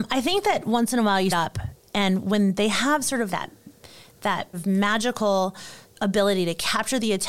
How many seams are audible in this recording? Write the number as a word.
three